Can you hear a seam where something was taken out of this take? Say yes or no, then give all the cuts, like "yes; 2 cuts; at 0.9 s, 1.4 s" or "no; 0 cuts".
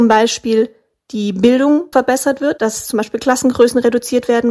yes; 1 cut; at 1.9 s